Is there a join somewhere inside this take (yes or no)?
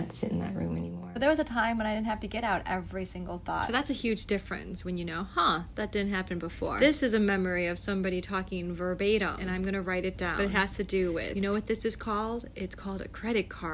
no